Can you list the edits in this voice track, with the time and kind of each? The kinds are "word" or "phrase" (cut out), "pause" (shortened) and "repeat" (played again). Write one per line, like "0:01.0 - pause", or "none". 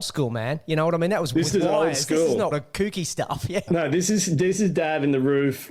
0:02.5 - phrase